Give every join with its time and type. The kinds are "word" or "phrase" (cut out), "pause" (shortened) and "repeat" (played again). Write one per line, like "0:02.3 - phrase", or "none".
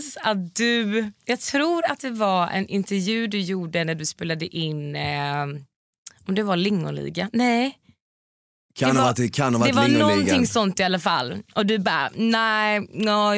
0:01.2 - pause